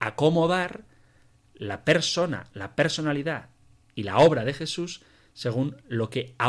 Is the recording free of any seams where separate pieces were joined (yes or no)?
yes